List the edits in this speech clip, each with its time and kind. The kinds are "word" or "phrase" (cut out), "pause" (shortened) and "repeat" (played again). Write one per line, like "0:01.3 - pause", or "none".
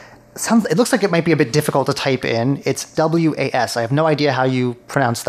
0:02.9 - phrase